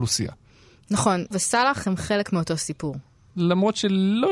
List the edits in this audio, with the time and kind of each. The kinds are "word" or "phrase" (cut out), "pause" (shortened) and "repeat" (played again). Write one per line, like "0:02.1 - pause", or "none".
0:01.3 - phrase